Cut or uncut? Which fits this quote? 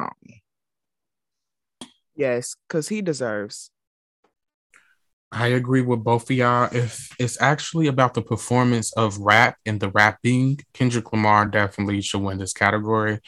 uncut